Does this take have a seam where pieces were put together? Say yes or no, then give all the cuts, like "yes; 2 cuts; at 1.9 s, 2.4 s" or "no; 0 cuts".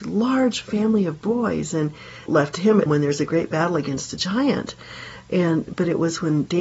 yes; 2 cuts; at 2.3 s, 2.9 s